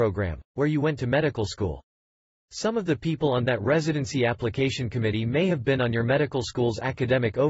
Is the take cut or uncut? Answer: uncut